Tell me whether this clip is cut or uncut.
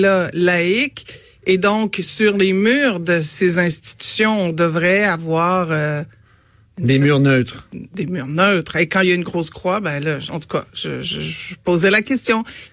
uncut